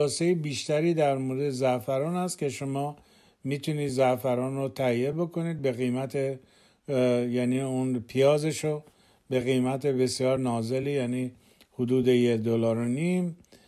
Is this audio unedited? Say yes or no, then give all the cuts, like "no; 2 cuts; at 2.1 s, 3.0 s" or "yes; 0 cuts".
yes; 0 cuts